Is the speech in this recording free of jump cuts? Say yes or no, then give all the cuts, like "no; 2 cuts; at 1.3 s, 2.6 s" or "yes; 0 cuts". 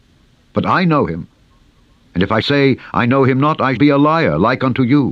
no; 2 cuts; at 2.4 s, 3.8 s